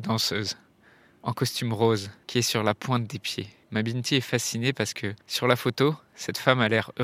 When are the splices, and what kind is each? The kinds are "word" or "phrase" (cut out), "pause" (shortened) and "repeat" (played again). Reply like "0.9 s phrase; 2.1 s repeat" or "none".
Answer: 2.2 s pause; 3.6 s pause; 5.2 s pause